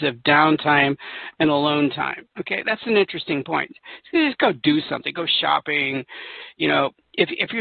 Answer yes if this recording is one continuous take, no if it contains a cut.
no